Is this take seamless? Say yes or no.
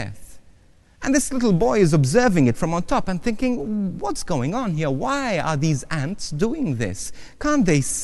yes